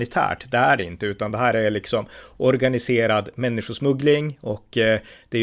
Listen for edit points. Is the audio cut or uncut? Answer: uncut